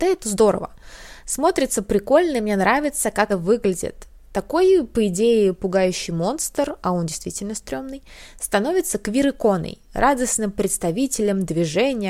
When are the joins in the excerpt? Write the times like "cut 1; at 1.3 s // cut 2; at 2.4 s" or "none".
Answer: cut 1; at 3.3 s